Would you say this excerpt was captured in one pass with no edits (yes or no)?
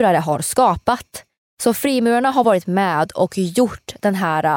yes